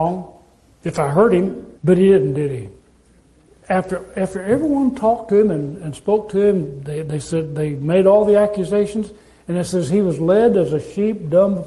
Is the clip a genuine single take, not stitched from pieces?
no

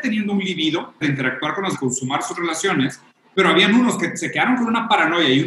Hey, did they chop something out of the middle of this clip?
yes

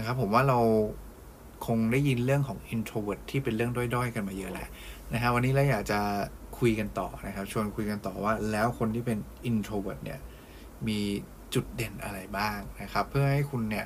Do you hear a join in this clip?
no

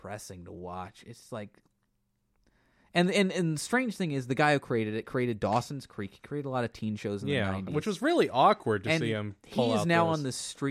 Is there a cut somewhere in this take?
no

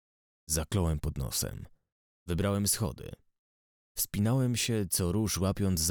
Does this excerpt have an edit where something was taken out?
no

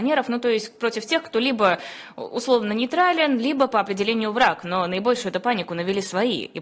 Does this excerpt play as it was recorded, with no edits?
yes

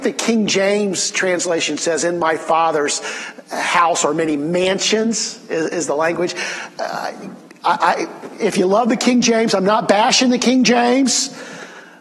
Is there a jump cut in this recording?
no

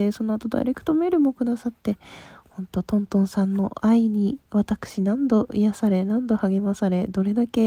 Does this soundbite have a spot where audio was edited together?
no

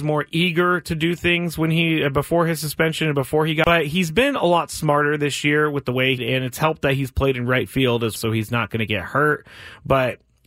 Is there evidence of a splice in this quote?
yes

